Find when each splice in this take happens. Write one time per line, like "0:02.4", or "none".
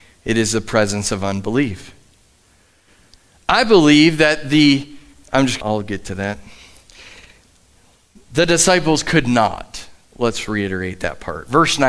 0:05.6